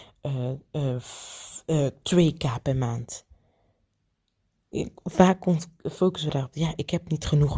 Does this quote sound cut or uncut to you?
cut